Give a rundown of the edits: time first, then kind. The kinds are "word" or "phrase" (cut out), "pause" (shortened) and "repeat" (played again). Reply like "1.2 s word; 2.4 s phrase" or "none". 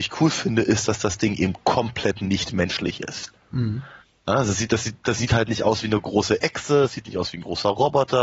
none